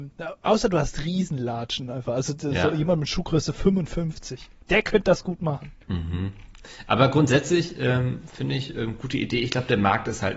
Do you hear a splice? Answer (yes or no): yes